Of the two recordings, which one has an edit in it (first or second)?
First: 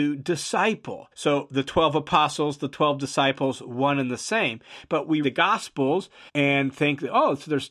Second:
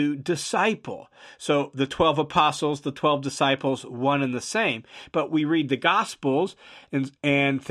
first